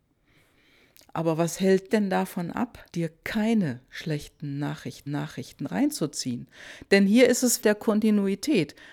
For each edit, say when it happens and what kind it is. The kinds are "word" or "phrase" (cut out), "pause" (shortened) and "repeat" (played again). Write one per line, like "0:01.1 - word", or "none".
0:01.9 - word
0:02.9 - pause
0:05.1 - repeat
0:07.6 - phrase